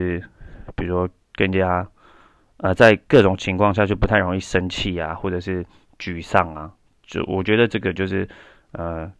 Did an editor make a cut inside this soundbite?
no; 0 cuts

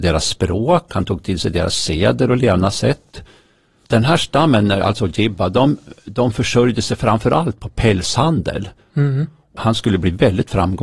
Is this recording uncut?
yes; 0 cuts

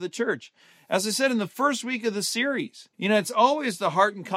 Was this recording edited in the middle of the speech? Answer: yes; 1 cut; at 2.9 s

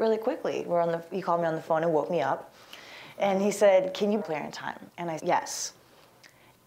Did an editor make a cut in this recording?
yes; 3 cuts; at 4.2 s, 4.9 s, 5.2 s

